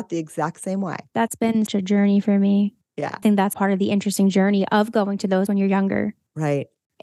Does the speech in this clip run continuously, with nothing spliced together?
no; 5 cuts; at 1.1 s, 1.7 s, 3.2 s, 3.5 s, 5.5 s

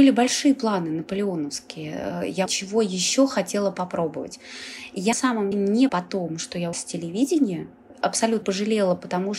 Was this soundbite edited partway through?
yes; 6 cuts; at 2.5 s, 5.1 s, 5.5 s, 5.9 s, 6.7 s, 8.4 s

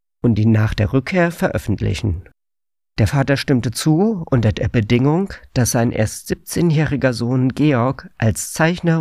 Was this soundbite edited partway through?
no; 0 cuts

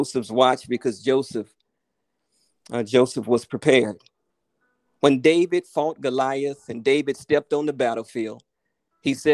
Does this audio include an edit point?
no; 0 cuts

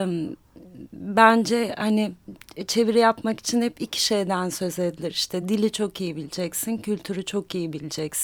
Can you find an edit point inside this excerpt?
no; 0 cuts

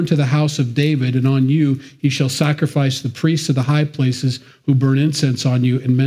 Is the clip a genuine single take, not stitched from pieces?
yes; 0 cuts

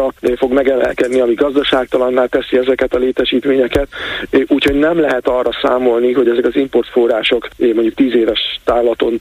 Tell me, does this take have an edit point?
no; 0 cuts

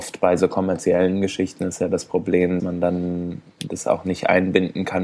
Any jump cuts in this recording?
yes; 1 cut; at 2.6 s

